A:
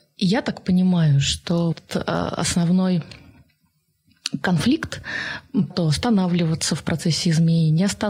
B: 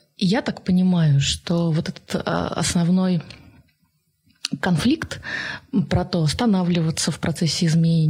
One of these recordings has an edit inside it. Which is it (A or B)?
A